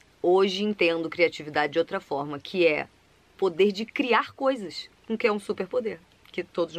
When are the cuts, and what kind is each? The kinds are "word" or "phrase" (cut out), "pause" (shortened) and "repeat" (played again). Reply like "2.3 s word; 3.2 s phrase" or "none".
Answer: 5.0 s pause